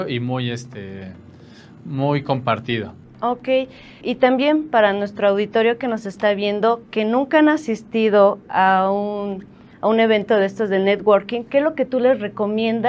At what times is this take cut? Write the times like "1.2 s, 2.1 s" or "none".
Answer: 4.0 s